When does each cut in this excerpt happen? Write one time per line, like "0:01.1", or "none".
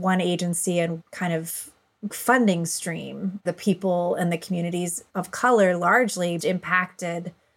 0:01.0
0:02.1
0:03.5
0:05.1
0:06.4